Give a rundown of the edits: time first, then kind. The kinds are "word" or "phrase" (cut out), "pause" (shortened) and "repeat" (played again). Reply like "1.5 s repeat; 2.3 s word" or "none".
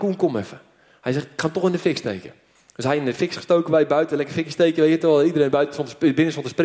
none